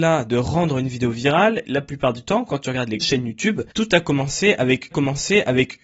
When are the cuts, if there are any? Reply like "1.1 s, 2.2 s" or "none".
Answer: 1.6 s, 3.0 s, 3.7 s, 4.9 s